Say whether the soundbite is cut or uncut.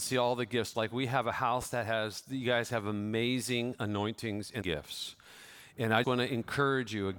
cut